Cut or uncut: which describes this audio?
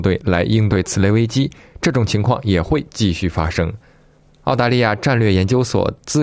uncut